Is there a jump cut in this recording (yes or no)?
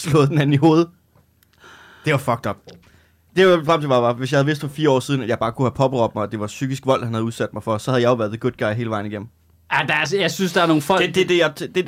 no